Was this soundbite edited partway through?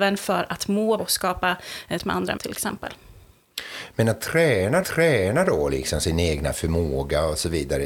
yes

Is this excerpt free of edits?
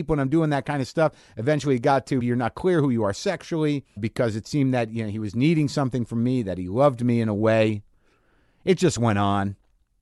no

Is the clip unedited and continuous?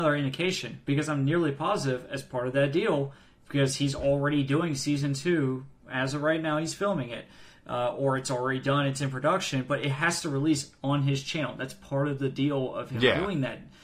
yes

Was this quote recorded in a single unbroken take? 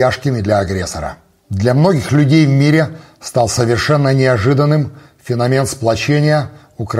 yes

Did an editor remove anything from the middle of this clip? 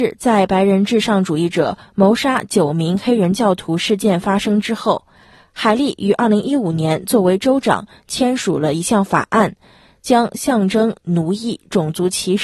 no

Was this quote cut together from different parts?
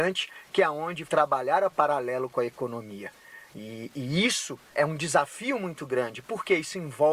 yes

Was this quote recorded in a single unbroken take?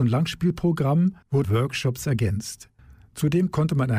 no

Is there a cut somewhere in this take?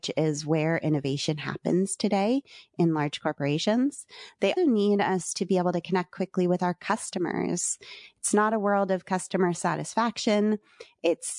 yes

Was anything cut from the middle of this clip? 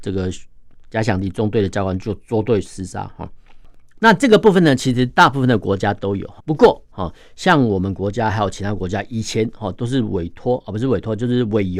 yes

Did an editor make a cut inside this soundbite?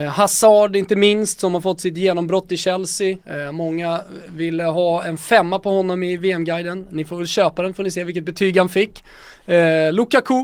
yes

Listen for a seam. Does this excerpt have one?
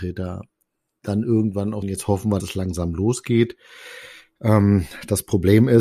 yes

